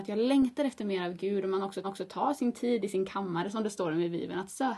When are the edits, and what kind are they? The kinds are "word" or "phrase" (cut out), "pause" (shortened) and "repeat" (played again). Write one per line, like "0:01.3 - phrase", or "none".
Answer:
0:01.8 - repeat